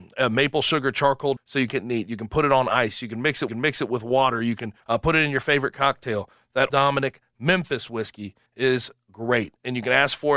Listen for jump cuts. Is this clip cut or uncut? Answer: cut